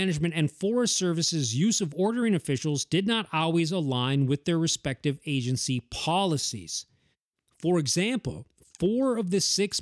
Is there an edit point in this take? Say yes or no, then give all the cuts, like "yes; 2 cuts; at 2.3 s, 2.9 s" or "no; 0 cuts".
no; 0 cuts